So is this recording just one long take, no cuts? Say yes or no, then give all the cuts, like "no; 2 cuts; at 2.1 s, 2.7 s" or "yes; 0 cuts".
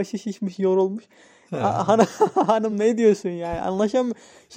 yes; 0 cuts